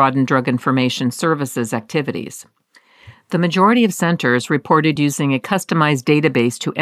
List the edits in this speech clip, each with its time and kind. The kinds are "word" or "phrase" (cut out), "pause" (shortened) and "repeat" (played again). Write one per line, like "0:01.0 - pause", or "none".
none